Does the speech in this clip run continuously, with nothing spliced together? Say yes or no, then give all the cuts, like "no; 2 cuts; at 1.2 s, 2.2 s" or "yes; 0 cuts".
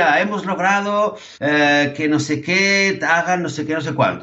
no; 1 cut; at 1.3 s